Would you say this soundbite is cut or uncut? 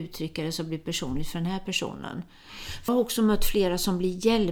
cut